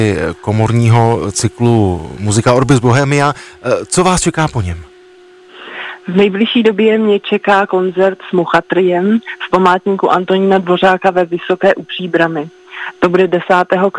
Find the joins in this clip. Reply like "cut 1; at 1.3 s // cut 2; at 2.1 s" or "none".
none